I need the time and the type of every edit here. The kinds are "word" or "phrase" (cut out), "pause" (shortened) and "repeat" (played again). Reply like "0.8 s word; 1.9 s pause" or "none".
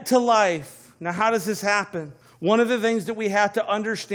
2.2 s pause